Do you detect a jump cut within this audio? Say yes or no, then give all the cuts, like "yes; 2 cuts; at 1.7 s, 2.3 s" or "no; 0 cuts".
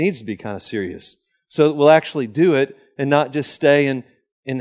no; 0 cuts